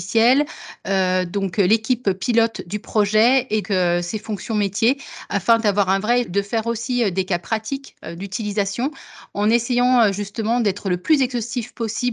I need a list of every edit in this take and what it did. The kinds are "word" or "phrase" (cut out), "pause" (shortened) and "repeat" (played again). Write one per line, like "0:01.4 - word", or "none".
0:03.6 - word
0:06.2 - word